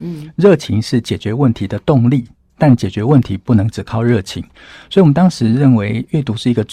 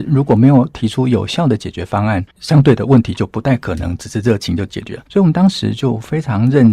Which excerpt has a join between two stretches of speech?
second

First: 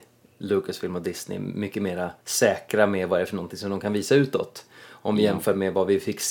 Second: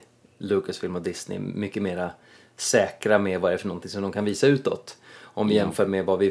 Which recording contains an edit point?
first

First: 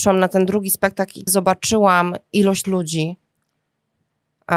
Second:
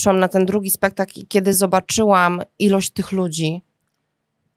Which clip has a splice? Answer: first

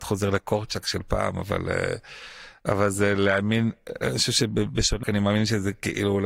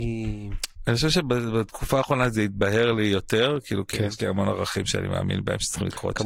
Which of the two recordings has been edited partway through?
first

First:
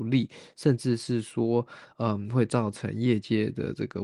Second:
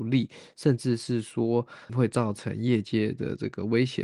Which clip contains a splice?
second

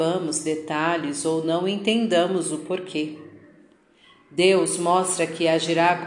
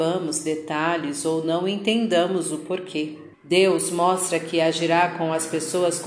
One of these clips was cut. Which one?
second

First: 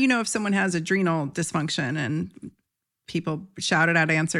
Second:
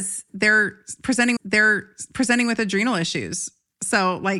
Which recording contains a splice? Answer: second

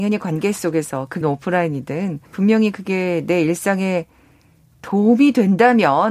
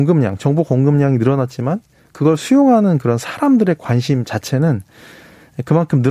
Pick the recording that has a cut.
first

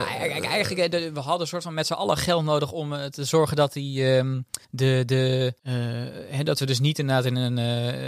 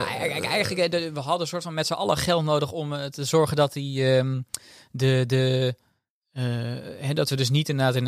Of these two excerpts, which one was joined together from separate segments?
first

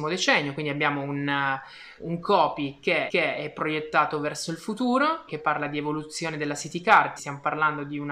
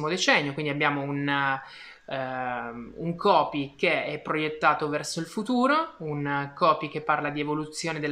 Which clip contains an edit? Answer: first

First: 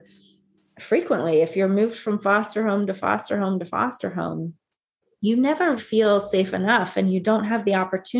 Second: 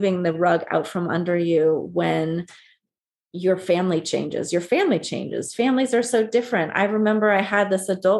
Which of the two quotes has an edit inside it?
first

